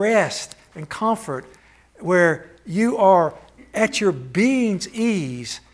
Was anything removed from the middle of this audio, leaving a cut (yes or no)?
no